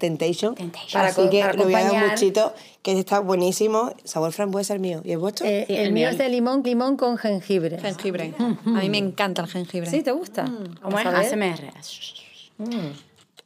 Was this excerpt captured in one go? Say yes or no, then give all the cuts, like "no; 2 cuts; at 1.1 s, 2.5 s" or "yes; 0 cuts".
no; 1 cut; at 6.6 s